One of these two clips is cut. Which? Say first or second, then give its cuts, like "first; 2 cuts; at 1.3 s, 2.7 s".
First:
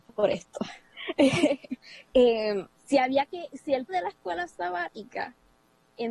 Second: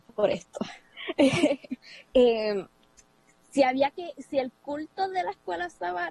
first; 2 cuts; at 2.7 s, 3.9 s